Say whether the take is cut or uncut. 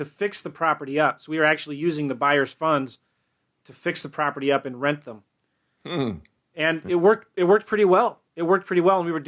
uncut